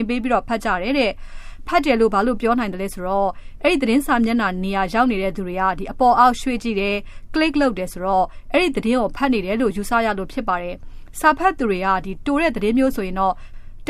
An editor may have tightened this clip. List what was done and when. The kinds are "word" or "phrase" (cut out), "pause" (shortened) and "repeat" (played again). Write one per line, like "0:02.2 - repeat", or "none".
none

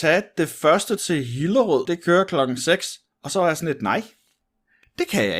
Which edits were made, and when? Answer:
0:01.0 - word
0:01.8 - word
0:03.1 - pause

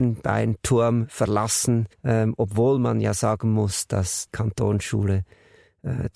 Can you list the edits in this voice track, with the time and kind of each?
0:01.9 - pause
0:04.3 - word

